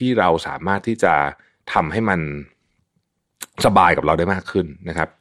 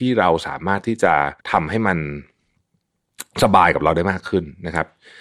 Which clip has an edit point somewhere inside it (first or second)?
second